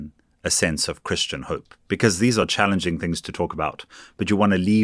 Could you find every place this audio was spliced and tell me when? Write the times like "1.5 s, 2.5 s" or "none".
none